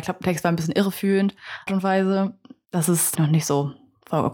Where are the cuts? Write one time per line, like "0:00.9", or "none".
0:01.7
0:03.1